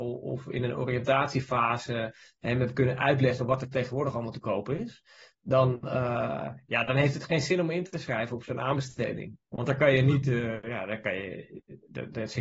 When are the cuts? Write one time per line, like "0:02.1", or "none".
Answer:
0:09.4